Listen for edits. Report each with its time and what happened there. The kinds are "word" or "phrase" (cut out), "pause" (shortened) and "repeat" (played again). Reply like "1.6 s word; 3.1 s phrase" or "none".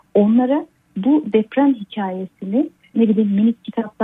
2.9 s word